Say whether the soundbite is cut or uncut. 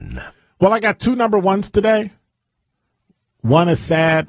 uncut